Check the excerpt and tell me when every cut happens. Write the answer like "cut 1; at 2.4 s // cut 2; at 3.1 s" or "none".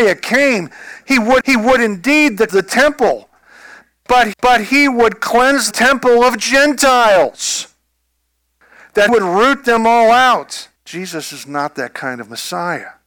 cut 1; at 1.4 s // cut 2; at 2.5 s // cut 3; at 4.3 s // cut 4; at 5.7 s // cut 5; at 9.1 s // cut 6; at 10.8 s